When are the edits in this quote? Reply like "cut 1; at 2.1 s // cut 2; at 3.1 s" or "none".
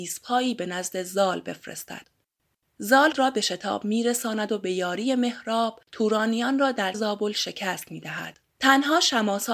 cut 1; at 3.1 s // cut 2; at 5.9 s // cut 3; at 6.9 s // cut 4; at 8.5 s